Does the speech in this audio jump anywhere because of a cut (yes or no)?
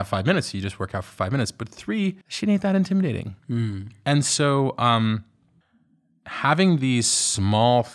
yes